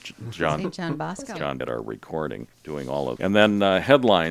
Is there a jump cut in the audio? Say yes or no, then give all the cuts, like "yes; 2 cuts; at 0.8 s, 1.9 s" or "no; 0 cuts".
yes; 3 cuts; at 1.6 s, 2.5 s, 3.2 s